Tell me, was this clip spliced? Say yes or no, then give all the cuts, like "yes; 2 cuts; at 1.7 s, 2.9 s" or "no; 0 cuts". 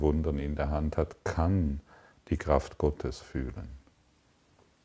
no; 0 cuts